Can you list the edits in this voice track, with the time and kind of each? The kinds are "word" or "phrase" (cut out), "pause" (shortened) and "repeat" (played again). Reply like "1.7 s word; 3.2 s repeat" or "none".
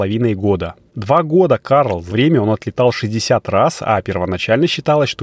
2.1 s word